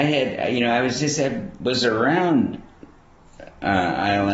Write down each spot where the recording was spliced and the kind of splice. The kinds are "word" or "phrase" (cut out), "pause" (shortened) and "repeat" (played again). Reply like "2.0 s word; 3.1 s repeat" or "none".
none